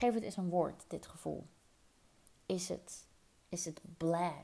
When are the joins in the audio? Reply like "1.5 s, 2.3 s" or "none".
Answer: none